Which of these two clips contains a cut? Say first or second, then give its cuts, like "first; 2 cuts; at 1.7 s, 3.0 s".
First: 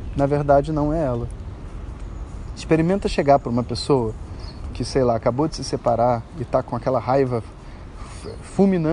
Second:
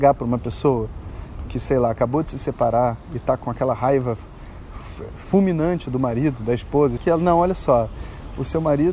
second; 1 cut; at 7.0 s